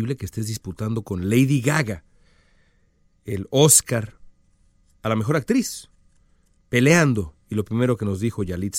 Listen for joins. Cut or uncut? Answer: uncut